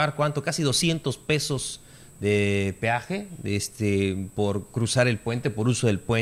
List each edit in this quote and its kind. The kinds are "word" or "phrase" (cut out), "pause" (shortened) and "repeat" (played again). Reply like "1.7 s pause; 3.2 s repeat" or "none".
none